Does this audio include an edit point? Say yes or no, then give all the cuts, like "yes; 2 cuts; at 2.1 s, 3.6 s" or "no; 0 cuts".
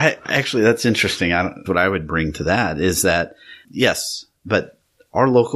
yes; 2 cuts; at 1.7 s, 3.6 s